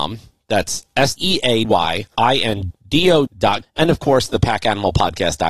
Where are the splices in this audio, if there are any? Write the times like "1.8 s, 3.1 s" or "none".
1.2 s, 1.6 s, 2.1 s, 2.7 s, 3.3 s, 3.6 s